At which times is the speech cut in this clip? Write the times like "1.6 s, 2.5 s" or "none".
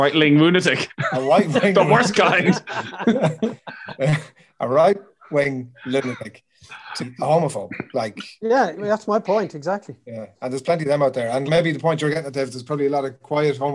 7.0 s, 11.5 s